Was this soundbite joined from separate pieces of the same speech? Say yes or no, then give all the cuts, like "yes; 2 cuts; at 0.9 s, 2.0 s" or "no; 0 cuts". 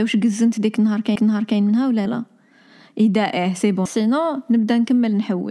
yes; 3 cuts; at 1.2 s, 2.1 s, 3.9 s